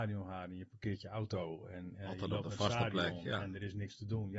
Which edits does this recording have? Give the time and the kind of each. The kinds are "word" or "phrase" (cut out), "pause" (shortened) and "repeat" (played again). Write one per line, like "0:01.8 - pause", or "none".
none

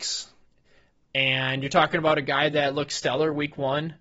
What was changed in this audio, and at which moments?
none

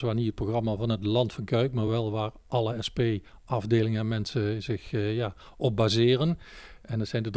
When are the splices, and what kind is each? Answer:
none

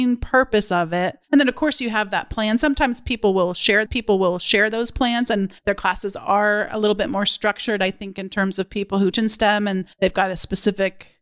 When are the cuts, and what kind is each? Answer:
0:01.2 - pause
0:03.9 - repeat
0:05.6 - pause
0:09.1 - word
0:09.9 - pause

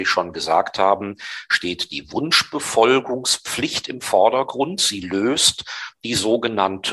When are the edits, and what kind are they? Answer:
none

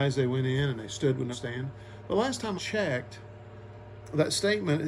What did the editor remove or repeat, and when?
0:01.3 - word
0:02.6 - word

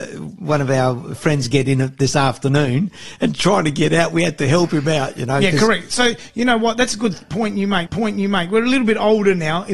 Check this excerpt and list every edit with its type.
0:07.9 - repeat

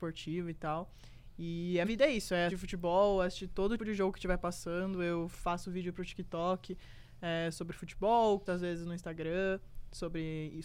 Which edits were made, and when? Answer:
0:01.8 - word
0:02.5 - word
0:03.8 - word
0:08.5 - word

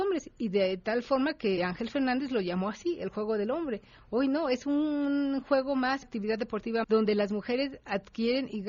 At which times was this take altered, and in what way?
0:01.6 - word
0:06.0 - word
0:06.8 - word

